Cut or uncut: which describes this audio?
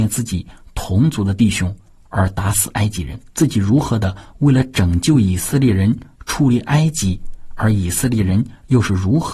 cut